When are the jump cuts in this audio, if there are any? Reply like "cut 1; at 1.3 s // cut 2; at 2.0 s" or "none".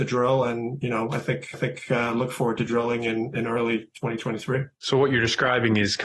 cut 1; at 1.5 s // cut 2; at 4.7 s

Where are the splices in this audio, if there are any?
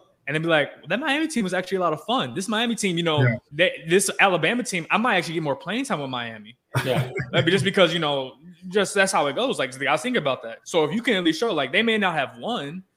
cut 1; at 3.5 s // cut 2; at 10.6 s

